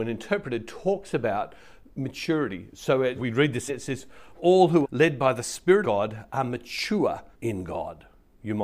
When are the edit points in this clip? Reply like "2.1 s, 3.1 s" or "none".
3.2 s, 3.7 s, 4.4 s, 4.8 s, 5.8 s, 7.3 s